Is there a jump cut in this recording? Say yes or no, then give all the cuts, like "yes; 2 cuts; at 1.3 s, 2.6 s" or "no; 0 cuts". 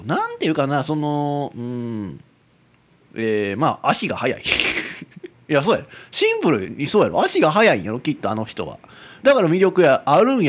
no; 0 cuts